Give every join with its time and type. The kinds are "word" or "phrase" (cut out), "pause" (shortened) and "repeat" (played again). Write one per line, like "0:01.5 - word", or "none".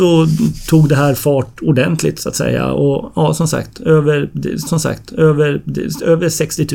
0:04.7 - repeat